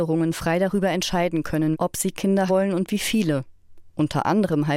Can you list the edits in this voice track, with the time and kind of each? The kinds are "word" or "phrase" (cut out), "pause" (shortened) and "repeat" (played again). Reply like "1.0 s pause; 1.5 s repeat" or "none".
1.7 s word; 2.5 s word